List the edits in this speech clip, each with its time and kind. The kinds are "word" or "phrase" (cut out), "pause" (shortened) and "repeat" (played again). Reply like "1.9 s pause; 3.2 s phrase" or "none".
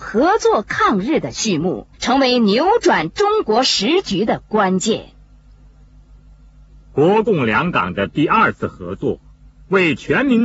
1.9 s pause